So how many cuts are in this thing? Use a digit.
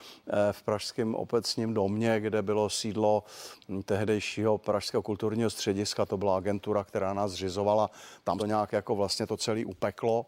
2